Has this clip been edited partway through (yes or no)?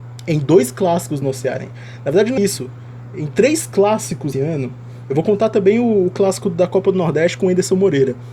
yes